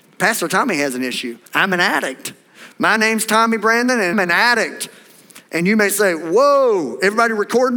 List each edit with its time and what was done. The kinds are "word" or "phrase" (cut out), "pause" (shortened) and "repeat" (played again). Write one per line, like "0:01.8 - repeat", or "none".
0:01.5 - pause
0:04.1 - word